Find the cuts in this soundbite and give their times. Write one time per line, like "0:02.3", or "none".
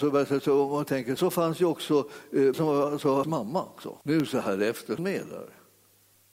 0:01.2
0:02.5
0:03.2
0:04.0
0:05.0